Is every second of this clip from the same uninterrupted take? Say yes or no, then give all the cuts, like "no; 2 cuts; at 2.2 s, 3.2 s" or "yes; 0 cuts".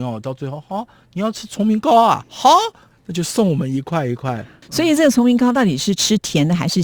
yes; 0 cuts